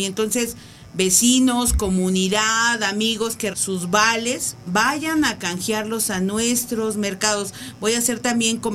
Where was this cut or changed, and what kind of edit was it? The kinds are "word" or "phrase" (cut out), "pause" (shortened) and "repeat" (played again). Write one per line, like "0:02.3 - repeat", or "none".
0:03.5 - word